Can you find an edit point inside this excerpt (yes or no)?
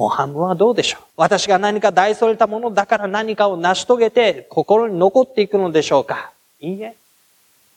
yes